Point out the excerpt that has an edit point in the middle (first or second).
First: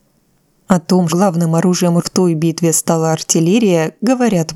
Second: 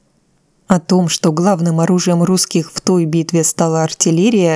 first